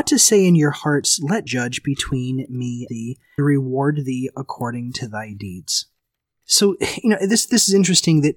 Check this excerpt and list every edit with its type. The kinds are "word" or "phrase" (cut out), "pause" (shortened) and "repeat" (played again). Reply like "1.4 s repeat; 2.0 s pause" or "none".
1.5 s word; 2.9 s word; 3.4 s word